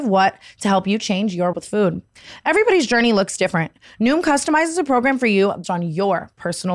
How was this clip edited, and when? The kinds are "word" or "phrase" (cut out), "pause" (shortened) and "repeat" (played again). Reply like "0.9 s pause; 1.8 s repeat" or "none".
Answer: 1.5 s word; 5.6 s word